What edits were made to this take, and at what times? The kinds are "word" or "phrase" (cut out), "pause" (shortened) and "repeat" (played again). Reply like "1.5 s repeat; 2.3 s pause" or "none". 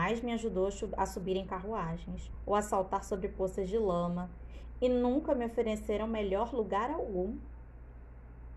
none